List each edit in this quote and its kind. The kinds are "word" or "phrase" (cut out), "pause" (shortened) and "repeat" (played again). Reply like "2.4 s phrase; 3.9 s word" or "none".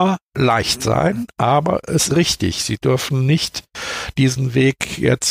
2.1 s word